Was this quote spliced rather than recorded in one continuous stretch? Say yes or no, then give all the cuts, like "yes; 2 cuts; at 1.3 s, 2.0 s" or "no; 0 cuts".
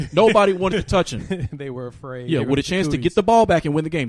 no; 0 cuts